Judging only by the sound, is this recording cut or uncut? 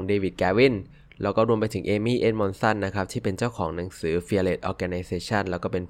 uncut